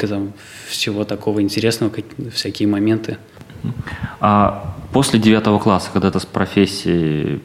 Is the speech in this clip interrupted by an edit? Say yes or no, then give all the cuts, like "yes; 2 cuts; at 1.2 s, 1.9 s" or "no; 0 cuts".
yes; 1 cut; at 6.1 s